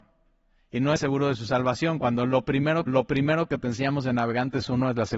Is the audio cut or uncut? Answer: cut